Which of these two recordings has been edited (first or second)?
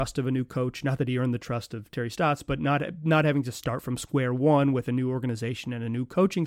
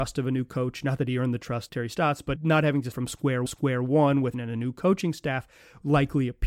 second